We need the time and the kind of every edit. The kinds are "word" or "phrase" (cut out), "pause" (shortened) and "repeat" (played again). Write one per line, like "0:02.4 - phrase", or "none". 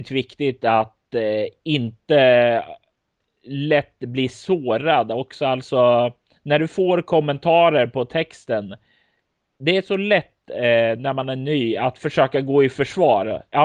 none

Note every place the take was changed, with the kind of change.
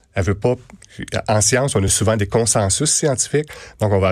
none

